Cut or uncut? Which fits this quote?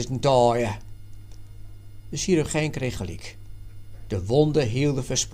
uncut